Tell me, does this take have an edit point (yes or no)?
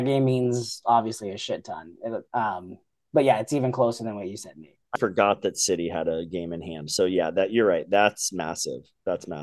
yes